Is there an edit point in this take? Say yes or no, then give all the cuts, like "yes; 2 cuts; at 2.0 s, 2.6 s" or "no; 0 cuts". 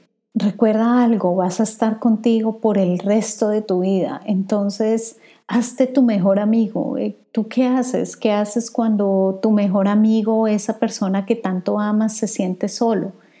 no; 0 cuts